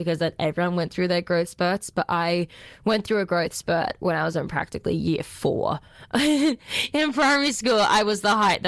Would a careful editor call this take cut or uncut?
uncut